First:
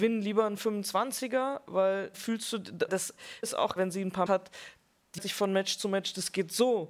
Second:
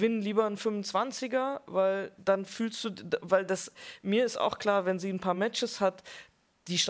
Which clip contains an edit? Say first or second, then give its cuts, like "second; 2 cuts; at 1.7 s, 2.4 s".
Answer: first; 6 cuts; at 2.1 s, 2.9 s, 3.4 s, 3.8 s, 4.3 s, 5.2 s